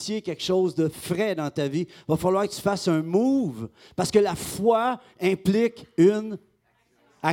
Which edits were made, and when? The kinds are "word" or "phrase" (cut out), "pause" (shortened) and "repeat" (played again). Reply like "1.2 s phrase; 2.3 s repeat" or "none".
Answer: none